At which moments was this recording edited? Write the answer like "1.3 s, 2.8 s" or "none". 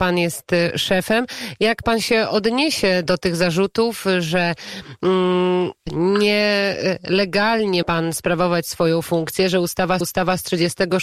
3.1 s, 7.8 s, 10.0 s